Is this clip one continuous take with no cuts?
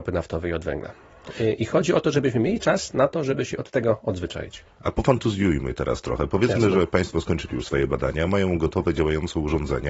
yes; 0 cuts

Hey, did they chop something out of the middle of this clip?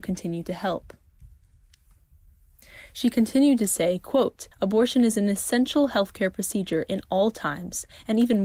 yes; 1 cut; at 4.5 s

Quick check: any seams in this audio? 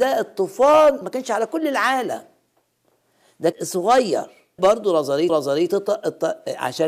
yes; 4 cuts; at 1.0 s, 3.5 s, 4.6 s, 5.3 s

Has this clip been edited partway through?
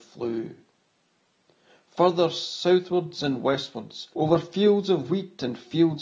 yes; 1 cut; at 4.1 s

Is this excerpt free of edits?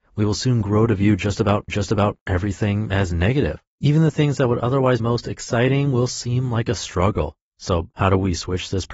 no; 4 cuts; at 1.7 s, 3.7 s, 5.0 s, 7.5 s

